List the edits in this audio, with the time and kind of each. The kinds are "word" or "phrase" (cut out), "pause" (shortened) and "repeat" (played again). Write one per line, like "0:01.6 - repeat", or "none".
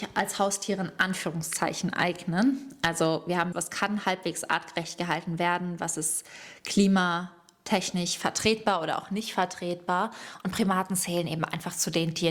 0:03.5 - phrase

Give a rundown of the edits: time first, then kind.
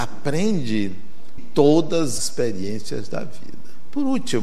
0:01.4 - word
0:02.2 - word

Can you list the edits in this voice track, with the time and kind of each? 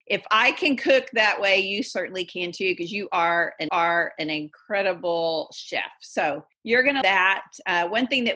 0:03.7 - repeat
0:07.0 - word

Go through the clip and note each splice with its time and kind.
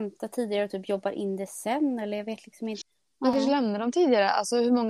none

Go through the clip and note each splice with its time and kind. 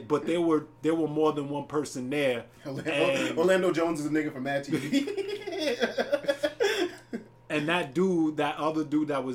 none

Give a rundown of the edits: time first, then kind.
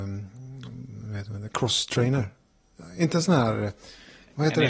none

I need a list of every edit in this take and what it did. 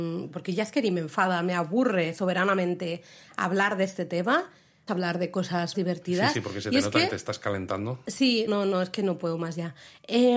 0:04.9 - word
0:05.7 - word
0:08.5 - word

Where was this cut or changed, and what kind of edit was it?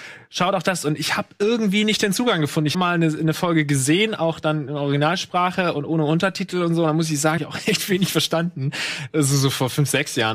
0:02.7 - phrase
0:07.4 - word

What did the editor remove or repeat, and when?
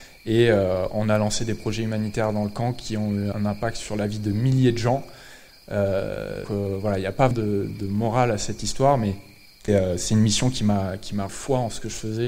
0:03.3 - word
0:06.4 - word
0:07.3 - word
0:07.7 - word
0:09.7 - word
0:11.3 - word

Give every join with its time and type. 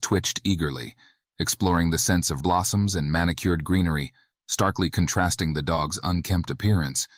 0:02.4 - word

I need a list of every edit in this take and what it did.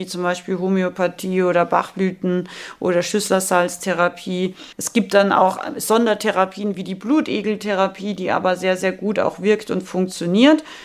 0:04.7 - pause

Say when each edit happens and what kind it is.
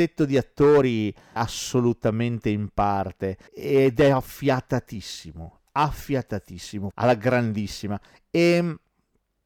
0:01.4 - word
0:03.5 - pause
0:06.9 - word

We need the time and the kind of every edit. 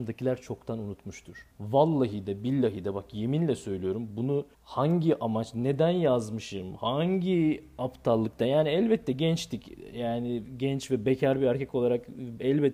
0:01.5 - pause
0:04.5 - pause

